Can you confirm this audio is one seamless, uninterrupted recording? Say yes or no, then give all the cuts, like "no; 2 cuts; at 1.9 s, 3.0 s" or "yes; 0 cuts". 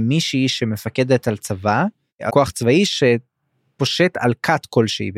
no; 1 cut; at 2.3 s